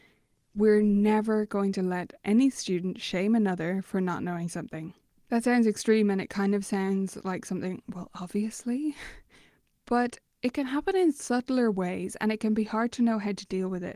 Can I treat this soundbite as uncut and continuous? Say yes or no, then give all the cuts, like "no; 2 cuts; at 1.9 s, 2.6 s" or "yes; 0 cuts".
no; 1 cut; at 5.1 s